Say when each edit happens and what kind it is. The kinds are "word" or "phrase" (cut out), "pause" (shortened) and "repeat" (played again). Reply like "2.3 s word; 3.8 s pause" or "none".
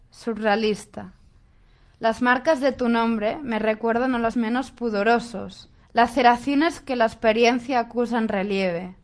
4.3 s word; 5.8 s pause

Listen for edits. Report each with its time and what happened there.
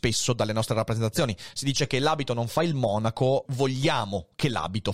3.4 s phrase

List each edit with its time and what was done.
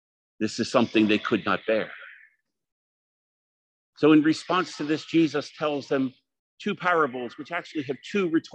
none

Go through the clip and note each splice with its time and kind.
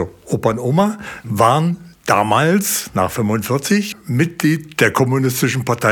none

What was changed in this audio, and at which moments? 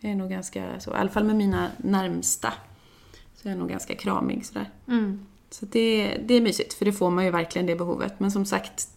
4.8 s pause

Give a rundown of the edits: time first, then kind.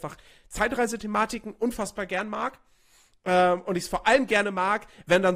none

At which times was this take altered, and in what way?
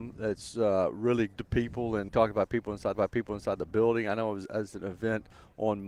1.4 s word; 2.1 s word; 2.9 s repeat

